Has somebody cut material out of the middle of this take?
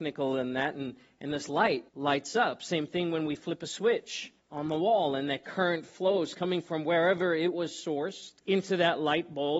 yes; 3 cuts; at 1.9 s, 4.4 s, 8.4 s

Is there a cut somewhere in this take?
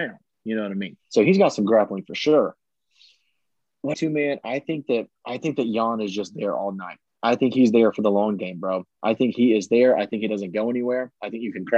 yes; 2 cuts; at 1.0 s, 3.9 s

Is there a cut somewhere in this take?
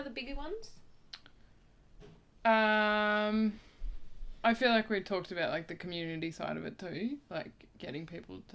no; 0 cuts

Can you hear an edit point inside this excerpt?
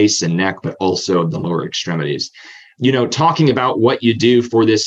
no; 0 cuts

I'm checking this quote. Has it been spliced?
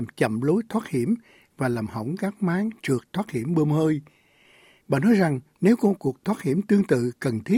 no; 0 cuts

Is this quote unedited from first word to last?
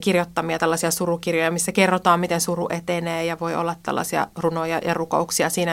yes; 0 cuts

